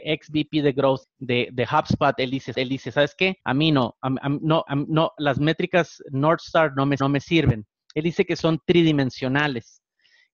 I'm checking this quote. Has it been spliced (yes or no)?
yes